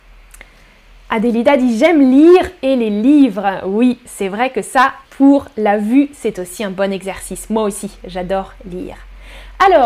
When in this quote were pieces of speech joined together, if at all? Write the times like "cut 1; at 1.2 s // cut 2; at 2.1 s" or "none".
cut 1; at 5.0 s